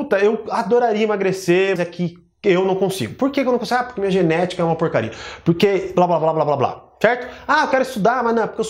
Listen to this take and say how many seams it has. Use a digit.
1